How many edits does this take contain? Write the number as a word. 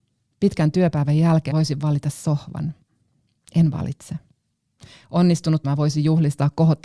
two